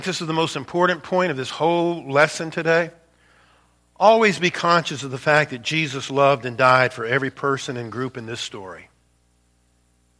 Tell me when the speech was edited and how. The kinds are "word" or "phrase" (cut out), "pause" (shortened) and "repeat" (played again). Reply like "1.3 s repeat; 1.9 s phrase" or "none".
none